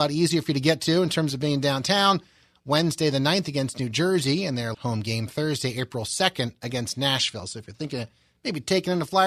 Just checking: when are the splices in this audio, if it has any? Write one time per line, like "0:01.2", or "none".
0:04.7